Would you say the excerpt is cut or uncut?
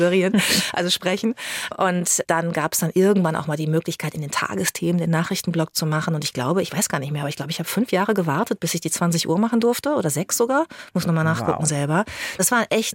uncut